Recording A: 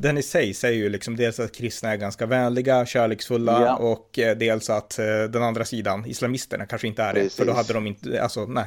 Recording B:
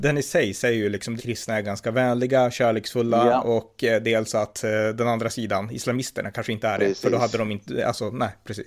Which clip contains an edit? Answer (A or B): B